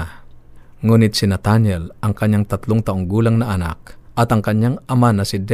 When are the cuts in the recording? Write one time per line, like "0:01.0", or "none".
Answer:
none